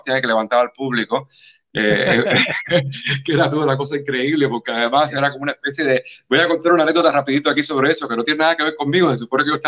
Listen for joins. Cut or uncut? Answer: uncut